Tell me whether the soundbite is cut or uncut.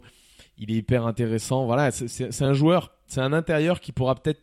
uncut